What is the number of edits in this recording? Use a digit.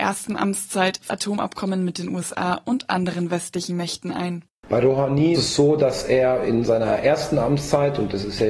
2